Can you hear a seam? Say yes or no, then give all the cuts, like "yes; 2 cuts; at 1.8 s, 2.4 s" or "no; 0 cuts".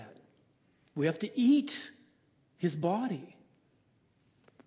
no; 0 cuts